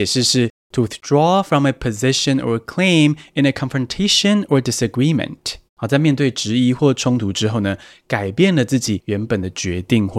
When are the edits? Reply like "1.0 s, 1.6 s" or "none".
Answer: 5.7 s